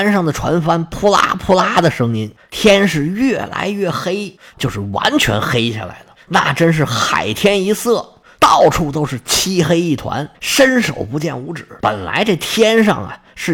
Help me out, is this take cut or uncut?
cut